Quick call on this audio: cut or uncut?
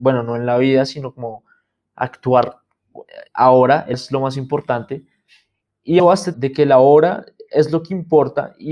cut